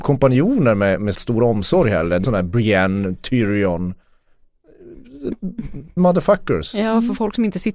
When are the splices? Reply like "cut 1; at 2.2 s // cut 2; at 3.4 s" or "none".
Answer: cut 1; at 1.1 s // cut 2; at 2.2 s // cut 3; at 6.0 s